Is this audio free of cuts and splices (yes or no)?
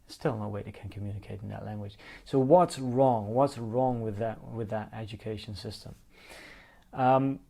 yes